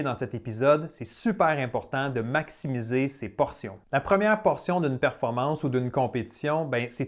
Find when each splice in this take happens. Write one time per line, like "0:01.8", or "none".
none